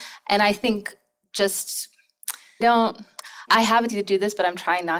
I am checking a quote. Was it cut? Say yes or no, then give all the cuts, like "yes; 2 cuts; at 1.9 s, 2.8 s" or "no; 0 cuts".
yes; 3 cuts; at 2.6 s, 3.5 s, 3.9 s